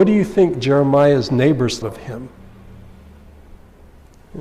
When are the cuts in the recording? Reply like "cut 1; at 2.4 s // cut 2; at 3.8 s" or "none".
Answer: cut 1; at 1.8 s